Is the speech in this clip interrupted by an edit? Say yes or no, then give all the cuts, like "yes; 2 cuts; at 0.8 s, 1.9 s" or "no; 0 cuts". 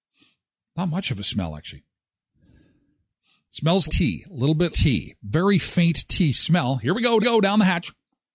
yes; 3 cuts; at 3.9 s, 4.7 s, 7.2 s